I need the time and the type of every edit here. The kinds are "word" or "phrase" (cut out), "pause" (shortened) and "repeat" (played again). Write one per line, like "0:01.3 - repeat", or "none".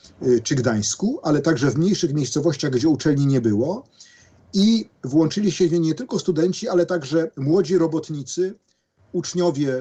none